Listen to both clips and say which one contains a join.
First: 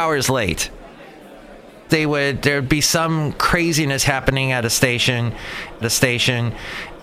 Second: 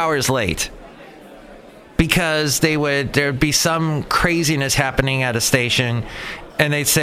first; 2 cuts; at 1.9 s, 5.8 s

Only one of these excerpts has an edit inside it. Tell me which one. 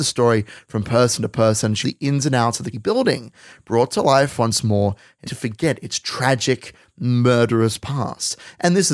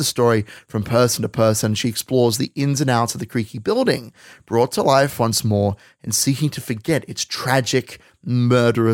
first; 3 cuts; at 1.8 s, 2.7 s, 5.3 s

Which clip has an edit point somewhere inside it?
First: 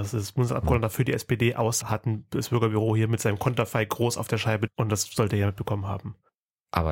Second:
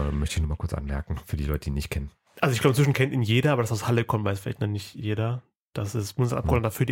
first; 2 cuts; at 1.8 s, 4.7 s

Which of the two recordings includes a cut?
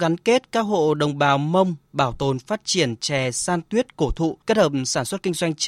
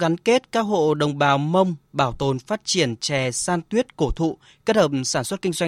first; 1 cut; at 4.4 s

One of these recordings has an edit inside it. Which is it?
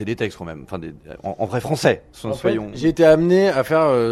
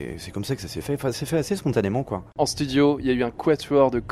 second; 1 cut; at 1.1 s

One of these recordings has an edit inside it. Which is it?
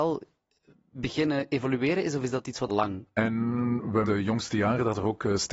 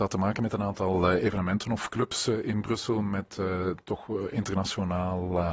first; 2 cuts; at 2.7 s, 4.1 s

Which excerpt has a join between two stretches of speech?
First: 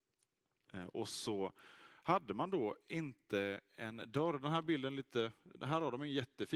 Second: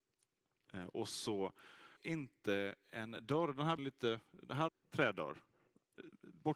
second; 3 cuts; at 2.0 s, 3.8 s, 4.7 s

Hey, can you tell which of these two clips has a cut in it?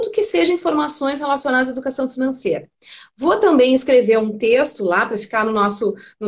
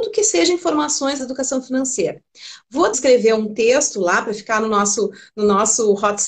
second; 2 cuts; at 1.2 s, 2.9 s

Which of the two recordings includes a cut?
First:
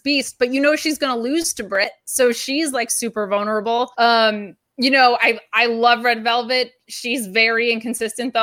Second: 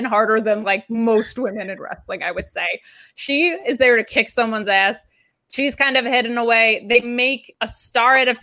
first; 1 cut; at 3.9 s

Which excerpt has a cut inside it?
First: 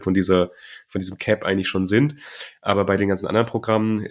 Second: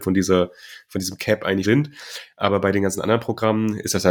second; 1 cut; at 1.6 s

